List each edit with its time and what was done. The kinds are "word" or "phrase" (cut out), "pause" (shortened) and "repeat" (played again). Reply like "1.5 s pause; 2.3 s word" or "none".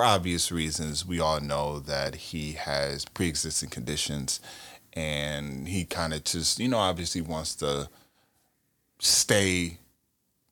none

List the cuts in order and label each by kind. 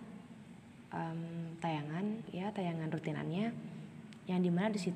2.3 s word

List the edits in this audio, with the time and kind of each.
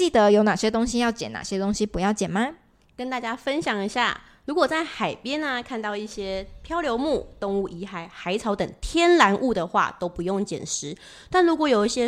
none

